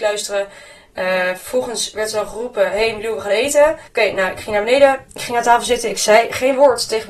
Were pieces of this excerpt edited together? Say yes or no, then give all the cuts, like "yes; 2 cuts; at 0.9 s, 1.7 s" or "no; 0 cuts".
yes; 1 cut; at 3.9 s